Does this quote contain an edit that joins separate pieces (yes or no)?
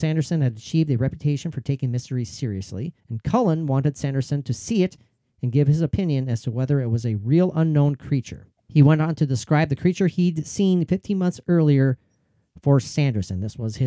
yes